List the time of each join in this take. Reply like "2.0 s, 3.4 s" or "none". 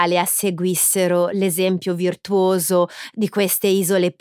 none